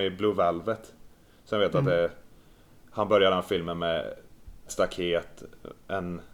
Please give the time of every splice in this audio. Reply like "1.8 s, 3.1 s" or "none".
4.7 s